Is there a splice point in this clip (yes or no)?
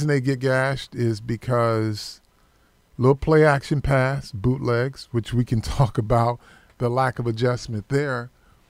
no